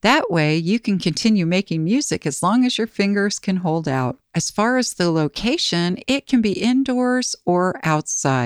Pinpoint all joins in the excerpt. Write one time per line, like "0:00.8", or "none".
0:04.2